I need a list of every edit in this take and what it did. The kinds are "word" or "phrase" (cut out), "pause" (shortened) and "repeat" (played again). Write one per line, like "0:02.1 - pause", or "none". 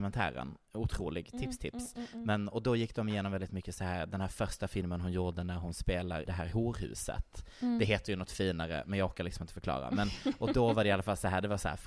0:06.3 - word